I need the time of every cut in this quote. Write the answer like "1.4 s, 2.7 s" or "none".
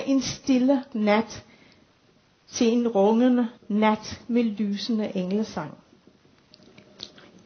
0.9 s, 3.6 s